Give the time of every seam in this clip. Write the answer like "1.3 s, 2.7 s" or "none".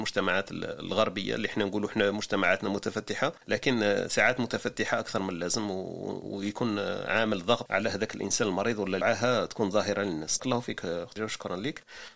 3.4 s, 7.7 s, 9.0 s, 10.4 s, 11.2 s

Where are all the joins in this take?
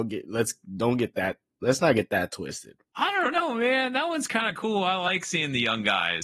none

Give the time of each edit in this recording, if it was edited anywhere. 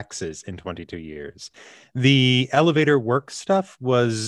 none

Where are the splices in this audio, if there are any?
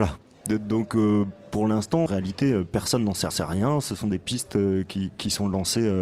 2.1 s, 3.3 s

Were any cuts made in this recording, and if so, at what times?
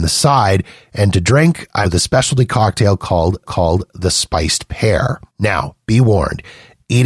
1.8 s, 3.4 s, 5.3 s

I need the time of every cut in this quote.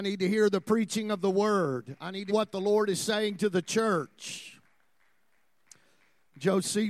2.3 s

